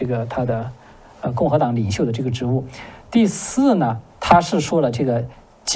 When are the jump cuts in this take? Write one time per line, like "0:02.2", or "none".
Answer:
0:04.1